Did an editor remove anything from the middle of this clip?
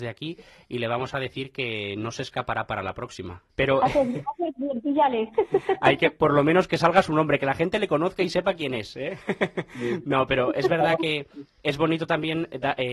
yes; 1 cut; at 3.5 s

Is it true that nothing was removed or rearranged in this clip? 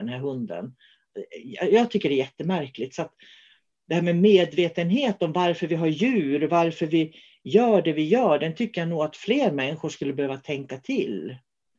yes; 0 cuts

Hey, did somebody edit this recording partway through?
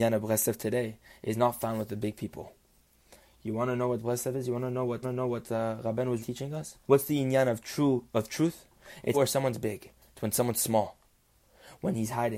yes; 4 cuts; at 5.0 s, 6.2 s, 6.8 s, 9.1 s

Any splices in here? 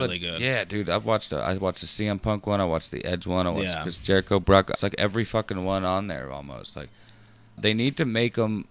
yes; 2 cuts; at 4.8 s, 7.6 s

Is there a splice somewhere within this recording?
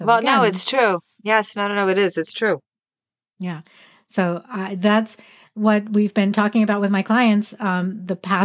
no; 0 cuts

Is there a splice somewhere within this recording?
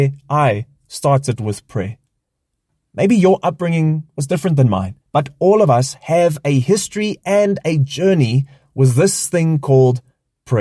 yes; 1 cut; at 5.0 s

